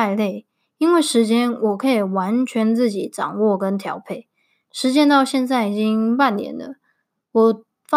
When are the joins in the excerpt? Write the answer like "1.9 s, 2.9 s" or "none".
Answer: none